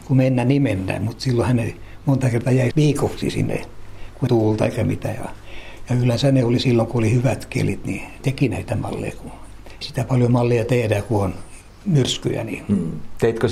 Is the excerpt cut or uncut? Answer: cut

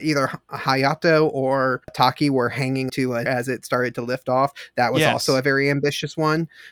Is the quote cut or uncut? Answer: cut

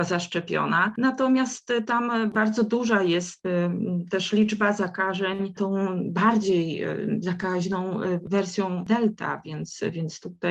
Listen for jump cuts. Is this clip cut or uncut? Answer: uncut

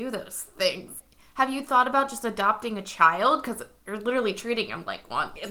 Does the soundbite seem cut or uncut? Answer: uncut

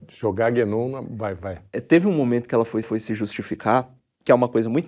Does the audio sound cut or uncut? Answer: cut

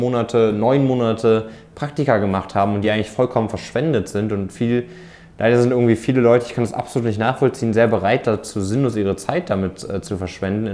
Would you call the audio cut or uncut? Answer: uncut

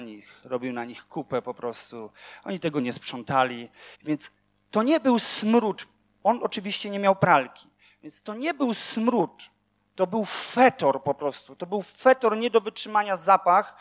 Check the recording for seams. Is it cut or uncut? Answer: cut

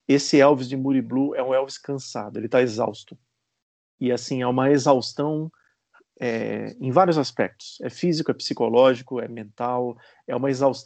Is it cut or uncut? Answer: uncut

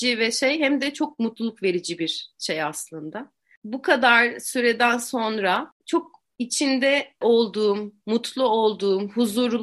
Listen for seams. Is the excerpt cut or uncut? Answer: cut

